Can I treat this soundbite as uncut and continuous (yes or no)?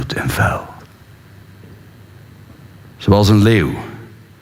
yes